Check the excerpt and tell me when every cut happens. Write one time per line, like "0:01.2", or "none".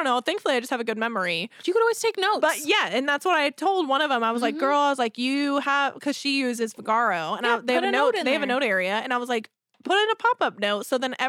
none